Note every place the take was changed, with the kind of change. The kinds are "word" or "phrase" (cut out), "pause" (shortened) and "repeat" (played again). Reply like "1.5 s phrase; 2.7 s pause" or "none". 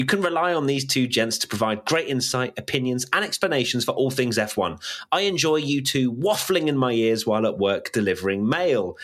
none